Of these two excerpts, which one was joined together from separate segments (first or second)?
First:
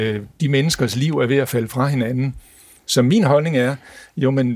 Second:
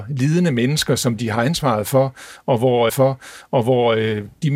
second